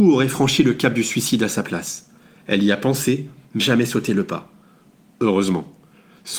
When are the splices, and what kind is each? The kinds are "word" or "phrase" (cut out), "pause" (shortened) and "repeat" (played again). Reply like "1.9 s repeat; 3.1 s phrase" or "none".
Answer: 3.6 s word